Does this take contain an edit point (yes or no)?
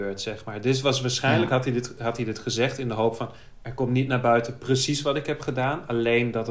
no